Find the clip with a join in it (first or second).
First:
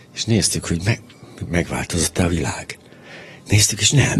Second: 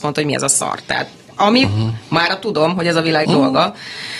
second